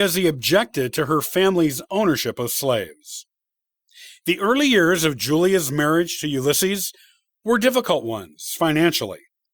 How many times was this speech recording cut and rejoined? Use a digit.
0